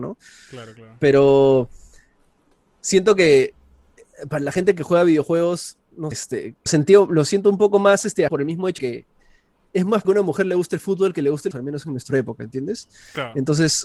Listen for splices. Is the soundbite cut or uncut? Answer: cut